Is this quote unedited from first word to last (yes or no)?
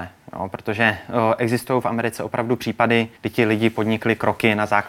no